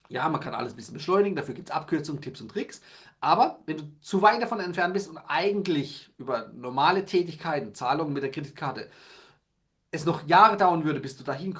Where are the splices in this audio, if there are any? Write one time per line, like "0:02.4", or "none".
none